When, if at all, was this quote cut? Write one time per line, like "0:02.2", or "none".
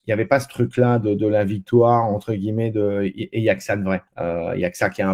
0:04.1

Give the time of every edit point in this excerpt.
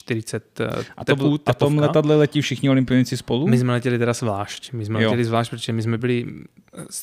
none

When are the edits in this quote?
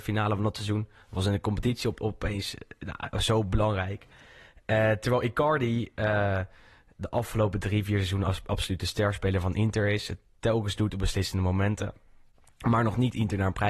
none

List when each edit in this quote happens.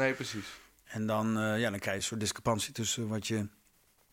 none

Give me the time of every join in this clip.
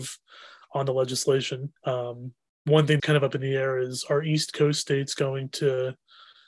0:01.8
0:03.0

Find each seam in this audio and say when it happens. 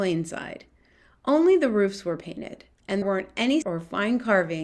0:03.0
0:03.6

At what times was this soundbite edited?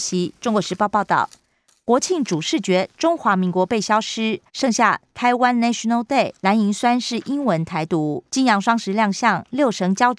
0:04.5
0:06.4
0:08.3

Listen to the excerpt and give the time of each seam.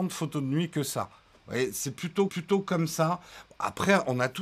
0:02.3

